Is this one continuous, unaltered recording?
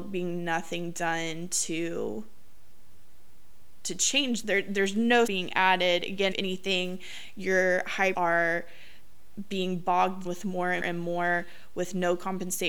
no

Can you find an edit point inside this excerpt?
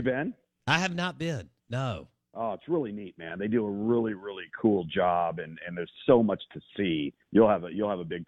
yes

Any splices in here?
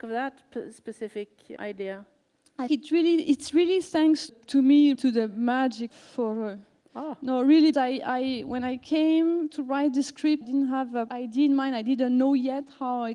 yes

